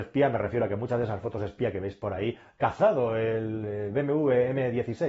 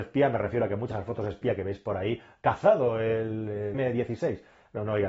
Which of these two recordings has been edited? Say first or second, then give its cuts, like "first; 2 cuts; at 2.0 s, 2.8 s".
second; 2 cuts; at 0.9 s, 3.7 s